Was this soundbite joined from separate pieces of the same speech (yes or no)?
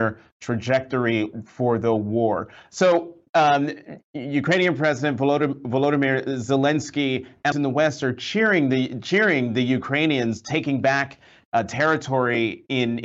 yes